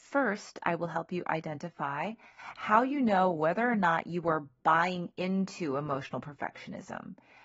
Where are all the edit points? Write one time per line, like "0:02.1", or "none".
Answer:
none